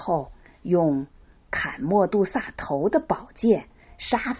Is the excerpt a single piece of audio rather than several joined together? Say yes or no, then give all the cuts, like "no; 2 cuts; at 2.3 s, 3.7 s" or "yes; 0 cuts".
yes; 0 cuts